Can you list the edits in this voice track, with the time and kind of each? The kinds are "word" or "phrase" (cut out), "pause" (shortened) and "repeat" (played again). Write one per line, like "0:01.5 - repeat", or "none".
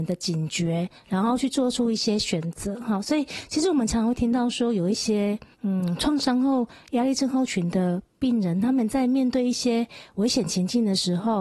0:05.5 - pause